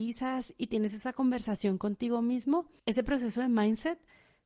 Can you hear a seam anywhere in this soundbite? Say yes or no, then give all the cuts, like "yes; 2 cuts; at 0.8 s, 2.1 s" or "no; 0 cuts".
yes; 1 cut; at 2.8 s